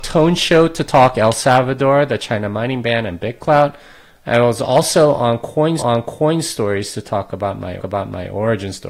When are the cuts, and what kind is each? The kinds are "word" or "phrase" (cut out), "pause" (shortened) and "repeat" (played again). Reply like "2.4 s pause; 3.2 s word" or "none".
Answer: 2.2 s word; 5.8 s repeat; 7.8 s repeat